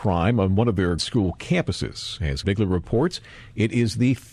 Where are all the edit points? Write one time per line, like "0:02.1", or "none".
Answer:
0:01.0
0:02.4